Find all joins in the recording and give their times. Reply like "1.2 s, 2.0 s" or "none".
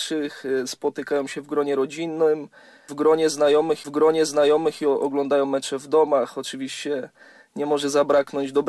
3.8 s